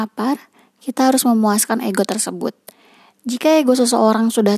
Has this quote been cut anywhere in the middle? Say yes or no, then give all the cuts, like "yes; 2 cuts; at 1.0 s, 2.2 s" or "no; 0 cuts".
no; 0 cuts